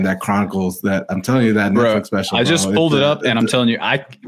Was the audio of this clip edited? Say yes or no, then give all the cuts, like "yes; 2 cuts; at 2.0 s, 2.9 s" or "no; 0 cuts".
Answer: no; 0 cuts